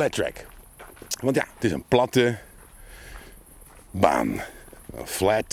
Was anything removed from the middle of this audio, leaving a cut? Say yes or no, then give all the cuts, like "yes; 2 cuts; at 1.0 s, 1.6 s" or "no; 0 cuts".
no; 0 cuts